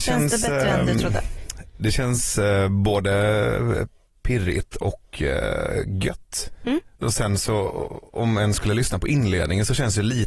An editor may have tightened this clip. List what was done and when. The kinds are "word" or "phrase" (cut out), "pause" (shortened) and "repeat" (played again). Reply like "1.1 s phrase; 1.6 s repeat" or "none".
6.9 s pause